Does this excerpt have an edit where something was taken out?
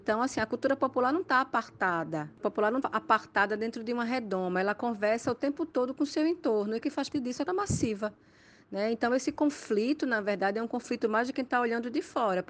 yes; 5 cuts; at 2.4 s, 2.8 s, 6.8 s, 7.1 s, 7.5 s

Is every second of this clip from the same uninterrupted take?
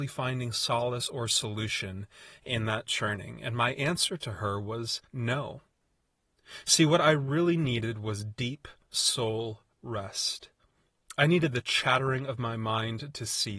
no; 1 cut; at 5.0 s

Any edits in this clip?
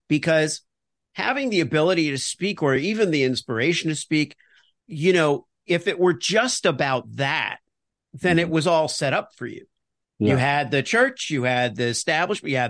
no; 0 cuts

